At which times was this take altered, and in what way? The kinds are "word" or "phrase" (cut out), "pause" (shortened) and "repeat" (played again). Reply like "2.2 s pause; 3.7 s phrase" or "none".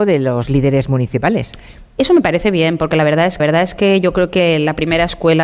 3.4 s repeat